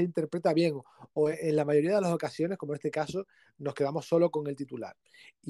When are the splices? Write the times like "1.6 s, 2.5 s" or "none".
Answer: none